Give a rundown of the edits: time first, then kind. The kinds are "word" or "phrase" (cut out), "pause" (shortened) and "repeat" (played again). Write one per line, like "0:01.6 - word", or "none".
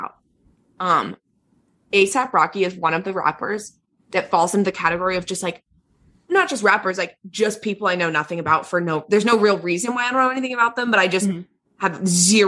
none